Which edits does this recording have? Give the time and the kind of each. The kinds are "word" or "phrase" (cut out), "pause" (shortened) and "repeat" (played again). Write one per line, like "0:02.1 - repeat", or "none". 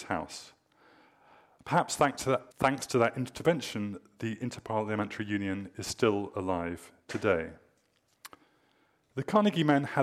0:02.5 - pause

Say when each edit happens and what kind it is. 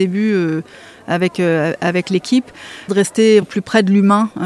0:02.9 - word
0:03.4 - word

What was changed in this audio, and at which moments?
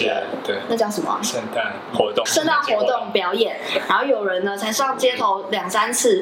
0:02.3 - word

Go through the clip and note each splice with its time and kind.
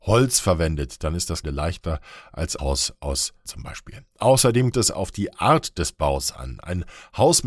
0:01.4 - word
0:02.6 - word
0:03.5 - word
0:04.7 - word

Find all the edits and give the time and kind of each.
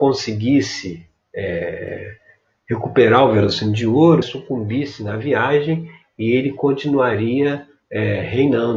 0:04.2 - word

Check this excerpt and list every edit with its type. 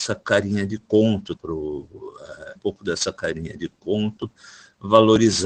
0:01.4 - phrase
0:02.6 - phrase

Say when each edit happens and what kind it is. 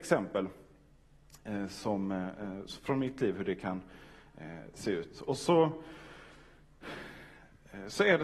none

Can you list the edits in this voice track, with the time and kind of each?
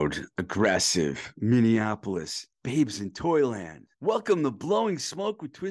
0:02.5 - pause
0:03.9 - pause

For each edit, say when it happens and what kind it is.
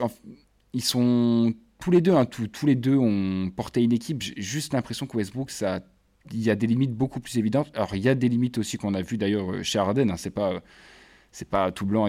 none

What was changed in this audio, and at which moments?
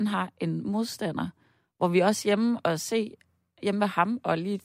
none

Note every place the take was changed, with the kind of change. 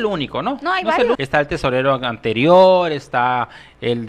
0:01.1 - word

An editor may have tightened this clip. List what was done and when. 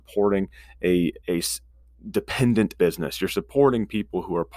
0:01.2 - pause
0:02.8 - word

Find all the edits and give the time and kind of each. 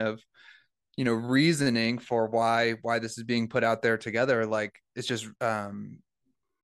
0:05.4 - pause

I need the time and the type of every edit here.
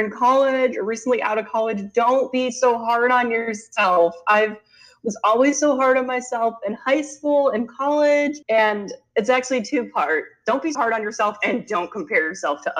0:08.4 - pause
0:10.7 - word

